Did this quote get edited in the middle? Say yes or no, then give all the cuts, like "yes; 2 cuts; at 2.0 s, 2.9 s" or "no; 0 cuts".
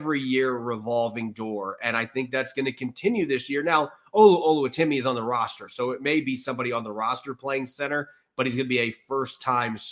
no; 0 cuts